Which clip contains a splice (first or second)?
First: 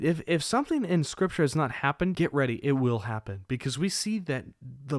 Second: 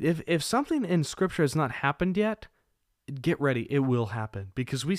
first